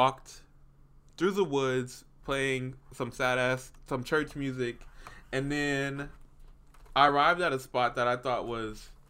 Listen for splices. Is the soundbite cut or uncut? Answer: uncut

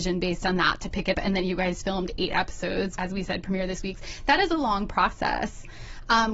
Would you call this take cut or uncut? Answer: cut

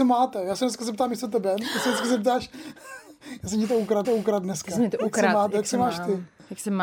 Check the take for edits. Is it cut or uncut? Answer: cut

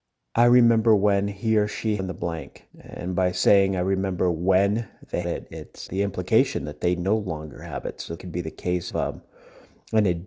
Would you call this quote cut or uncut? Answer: cut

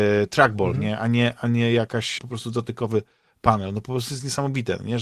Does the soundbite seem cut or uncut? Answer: cut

